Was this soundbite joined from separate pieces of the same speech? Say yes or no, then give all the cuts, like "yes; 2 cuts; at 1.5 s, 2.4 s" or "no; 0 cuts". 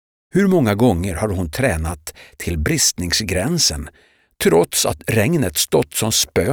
no; 0 cuts